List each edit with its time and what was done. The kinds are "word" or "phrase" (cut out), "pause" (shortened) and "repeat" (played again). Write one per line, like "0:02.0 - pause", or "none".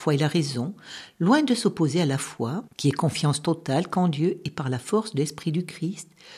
0:02.7 - pause